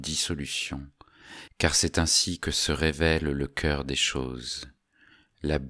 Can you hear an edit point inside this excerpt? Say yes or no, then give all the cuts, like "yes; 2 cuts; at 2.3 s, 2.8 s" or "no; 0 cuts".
no; 0 cuts